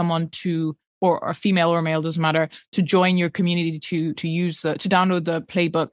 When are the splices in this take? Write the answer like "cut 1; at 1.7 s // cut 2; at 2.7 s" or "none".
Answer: cut 1; at 4.2 s